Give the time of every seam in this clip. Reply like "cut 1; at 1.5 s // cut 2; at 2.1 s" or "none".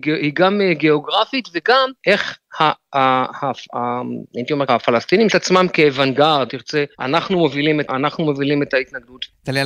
cut 1; at 2.0 s // cut 2; at 4.7 s // cut 3; at 5.3 s // cut 4; at 6.5 s // cut 5; at 6.9 s // cut 6; at 7.9 s